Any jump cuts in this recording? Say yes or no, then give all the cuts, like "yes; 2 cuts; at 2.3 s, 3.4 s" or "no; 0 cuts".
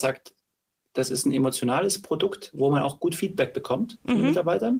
no; 0 cuts